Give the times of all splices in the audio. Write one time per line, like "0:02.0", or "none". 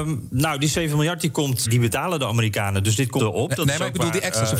0:01.6
0:03.2